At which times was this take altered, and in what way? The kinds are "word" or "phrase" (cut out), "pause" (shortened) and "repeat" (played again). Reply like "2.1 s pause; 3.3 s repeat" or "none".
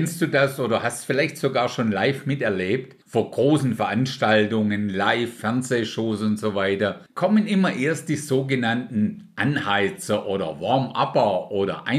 3.0 s pause; 7.1 s pause